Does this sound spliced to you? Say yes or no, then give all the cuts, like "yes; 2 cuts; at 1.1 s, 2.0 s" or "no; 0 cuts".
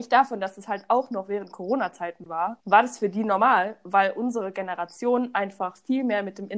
yes; 1 cut; at 2.6 s